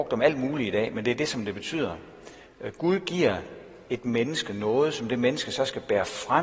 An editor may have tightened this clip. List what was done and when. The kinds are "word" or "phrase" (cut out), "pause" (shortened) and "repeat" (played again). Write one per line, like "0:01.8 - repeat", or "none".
none